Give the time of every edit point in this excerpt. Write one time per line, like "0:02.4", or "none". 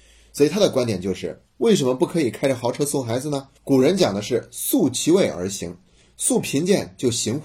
0:03.6